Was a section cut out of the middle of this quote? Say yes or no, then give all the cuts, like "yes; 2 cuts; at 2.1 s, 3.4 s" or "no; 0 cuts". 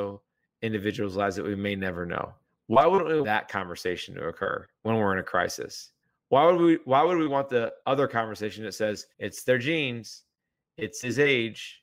yes; 6 cuts; at 2.4 s, 3.2 s, 4.8 s, 6.0 s, 7.8 s, 9.1 s